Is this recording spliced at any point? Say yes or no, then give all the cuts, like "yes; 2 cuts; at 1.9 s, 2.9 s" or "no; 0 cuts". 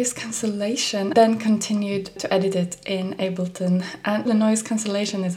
yes; 3 cuts; at 1.1 s, 2.2 s, 4.3 s